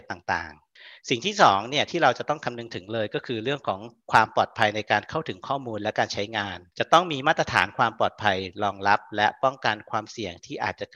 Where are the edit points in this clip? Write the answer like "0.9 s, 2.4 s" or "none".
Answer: 6.7 s